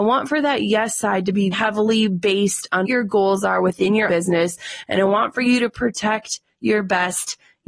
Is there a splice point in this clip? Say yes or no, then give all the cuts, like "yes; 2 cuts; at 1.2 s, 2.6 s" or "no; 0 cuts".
yes; 3 cuts; at 1.5 s, 2.8 s, 4.1 s